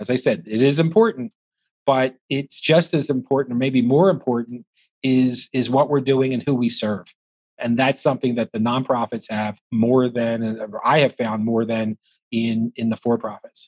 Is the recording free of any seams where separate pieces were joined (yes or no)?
no